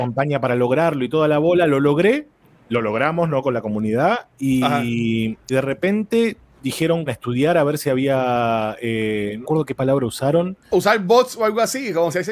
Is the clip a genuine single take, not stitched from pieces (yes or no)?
no